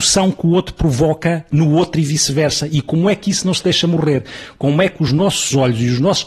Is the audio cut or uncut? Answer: uncut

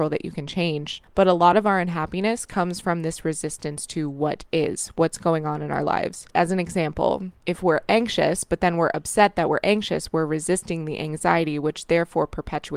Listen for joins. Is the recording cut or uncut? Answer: cut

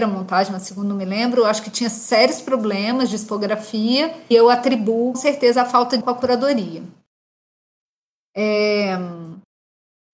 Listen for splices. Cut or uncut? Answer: cut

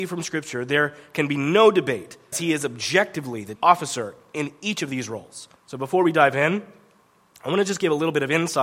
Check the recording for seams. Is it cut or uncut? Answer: cut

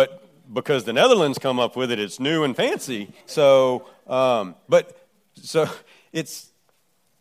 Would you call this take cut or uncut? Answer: cut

